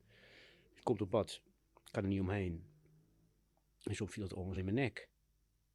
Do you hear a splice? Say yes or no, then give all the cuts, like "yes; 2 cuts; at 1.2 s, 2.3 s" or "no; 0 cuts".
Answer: yes; 2 cuts; at 1.1 s, 4.6 s